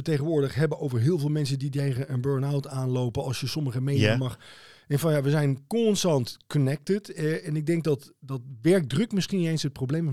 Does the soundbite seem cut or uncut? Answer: uncut